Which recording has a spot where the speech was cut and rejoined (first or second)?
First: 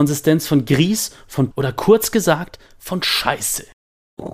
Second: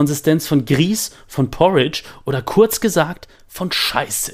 first